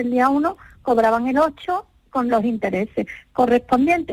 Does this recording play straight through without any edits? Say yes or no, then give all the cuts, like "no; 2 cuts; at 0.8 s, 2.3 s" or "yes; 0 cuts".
yes; 0 cuts